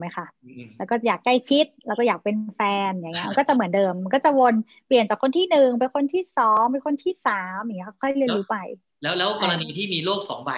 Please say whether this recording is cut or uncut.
uncut